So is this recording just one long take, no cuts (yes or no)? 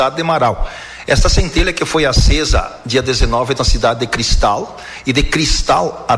no